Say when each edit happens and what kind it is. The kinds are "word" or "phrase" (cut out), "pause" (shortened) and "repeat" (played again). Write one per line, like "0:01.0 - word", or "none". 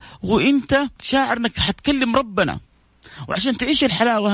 0:01.0 - pause